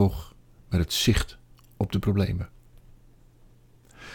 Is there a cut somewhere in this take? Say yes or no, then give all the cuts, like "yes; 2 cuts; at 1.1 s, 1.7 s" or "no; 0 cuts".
no; 0 cuts